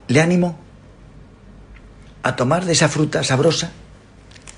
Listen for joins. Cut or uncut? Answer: uncut